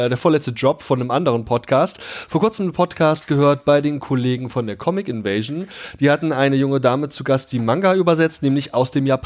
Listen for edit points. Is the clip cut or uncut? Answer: uncut